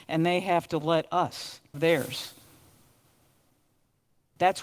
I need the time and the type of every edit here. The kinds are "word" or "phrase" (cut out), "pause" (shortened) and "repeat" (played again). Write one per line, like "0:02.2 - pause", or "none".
0:01.7 - word